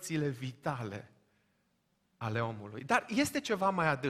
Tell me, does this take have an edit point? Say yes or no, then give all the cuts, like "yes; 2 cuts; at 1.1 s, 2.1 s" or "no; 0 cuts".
no; 0 cuts